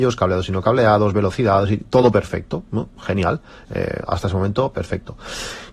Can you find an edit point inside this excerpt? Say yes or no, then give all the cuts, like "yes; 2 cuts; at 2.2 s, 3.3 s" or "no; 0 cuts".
no; 0 cuts